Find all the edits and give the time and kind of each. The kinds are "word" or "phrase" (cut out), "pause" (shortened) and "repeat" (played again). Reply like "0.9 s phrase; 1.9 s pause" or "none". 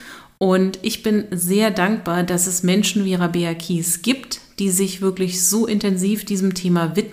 none